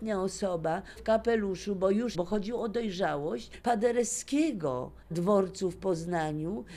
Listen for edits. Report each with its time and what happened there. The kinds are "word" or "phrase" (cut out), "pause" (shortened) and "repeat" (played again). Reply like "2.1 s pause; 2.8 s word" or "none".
1.0 s word; 2.1 s word; 3.6 s word; 5.1 s word